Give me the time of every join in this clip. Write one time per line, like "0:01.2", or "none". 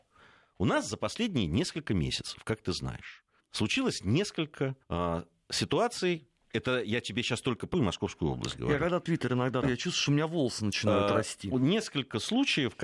0:03.4
0:04.8
0:07.7
0:09.0
0:09.6